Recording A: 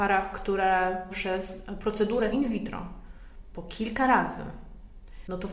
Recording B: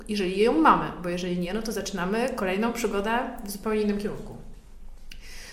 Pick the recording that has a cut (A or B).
A